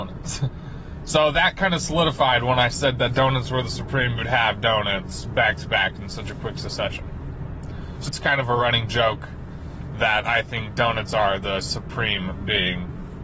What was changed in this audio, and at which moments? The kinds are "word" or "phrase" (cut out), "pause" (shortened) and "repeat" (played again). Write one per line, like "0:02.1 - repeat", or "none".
0:04.2 - phrase
0:08.1 - word